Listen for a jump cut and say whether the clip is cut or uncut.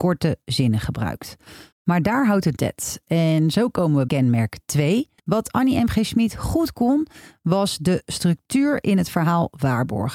cut